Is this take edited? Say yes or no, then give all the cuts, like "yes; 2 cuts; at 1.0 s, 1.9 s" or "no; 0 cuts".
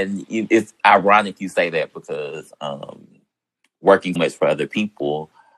yes; 1 cut; at 4.2 s